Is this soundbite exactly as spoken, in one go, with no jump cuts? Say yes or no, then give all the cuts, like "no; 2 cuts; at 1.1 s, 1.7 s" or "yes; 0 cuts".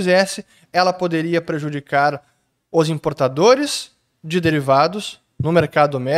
yes; 0 cuts